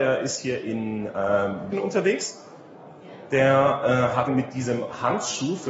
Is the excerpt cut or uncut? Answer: cut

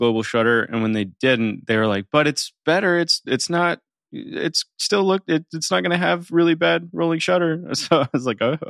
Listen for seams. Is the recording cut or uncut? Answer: uncut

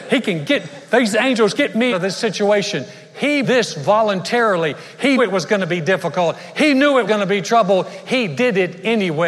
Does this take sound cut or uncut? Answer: cut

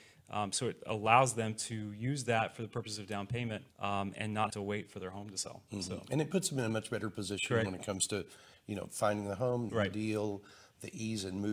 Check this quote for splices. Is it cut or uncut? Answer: cut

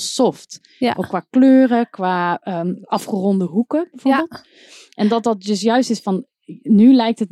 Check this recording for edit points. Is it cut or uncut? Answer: uncut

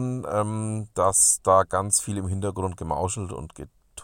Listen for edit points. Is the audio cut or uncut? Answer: uncut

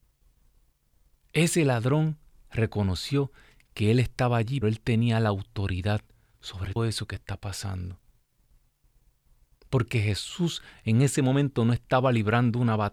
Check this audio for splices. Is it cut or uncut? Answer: cut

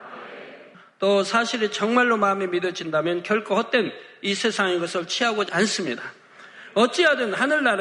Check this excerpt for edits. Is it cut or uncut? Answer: cut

